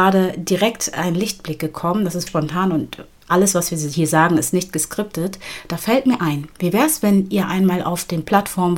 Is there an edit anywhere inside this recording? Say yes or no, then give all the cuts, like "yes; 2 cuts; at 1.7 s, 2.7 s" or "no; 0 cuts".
yes; 1 cut; at 2.3 s